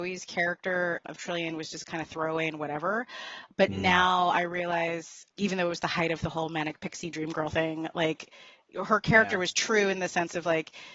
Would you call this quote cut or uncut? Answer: uncut